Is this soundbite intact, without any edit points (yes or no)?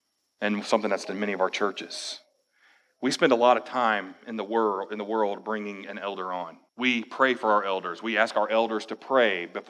no